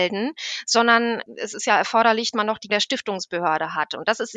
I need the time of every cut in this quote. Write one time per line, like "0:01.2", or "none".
0:02.3
0:02.7